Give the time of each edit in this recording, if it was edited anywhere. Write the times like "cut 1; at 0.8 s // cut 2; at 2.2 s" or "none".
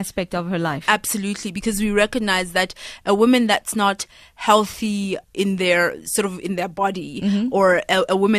cut 1; at 5.2 s